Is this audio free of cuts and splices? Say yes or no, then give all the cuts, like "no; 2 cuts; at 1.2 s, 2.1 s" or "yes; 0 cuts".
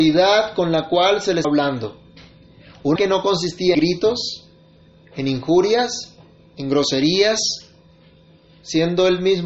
no; 3 cuts; at 1.4 s, 3.0 s, 3.7 s